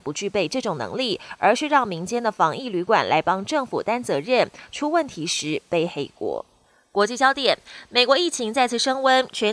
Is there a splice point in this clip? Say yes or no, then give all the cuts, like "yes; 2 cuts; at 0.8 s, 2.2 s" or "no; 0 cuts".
no; 0 cuts